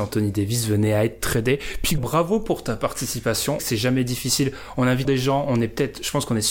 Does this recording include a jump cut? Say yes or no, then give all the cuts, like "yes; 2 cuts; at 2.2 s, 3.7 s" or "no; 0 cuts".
yes; 3 cuts; at 2.0 s, 3.6 s, 5.0 s